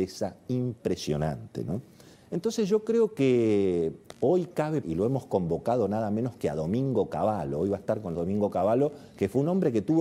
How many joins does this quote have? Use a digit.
3